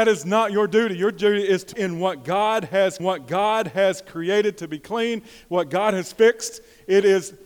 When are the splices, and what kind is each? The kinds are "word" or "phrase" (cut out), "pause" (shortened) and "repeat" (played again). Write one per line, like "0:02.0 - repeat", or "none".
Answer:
0:01.7 - word
0:03.0 - repeat

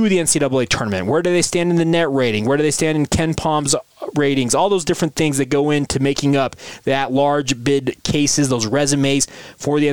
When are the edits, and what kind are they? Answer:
none

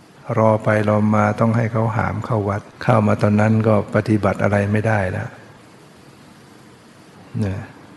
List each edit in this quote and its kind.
0:02.7 - pause

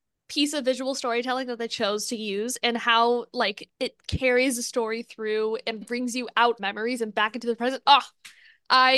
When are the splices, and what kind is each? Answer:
0:03.7 - pause
0:05.8 - word
0:06.6 - phrase

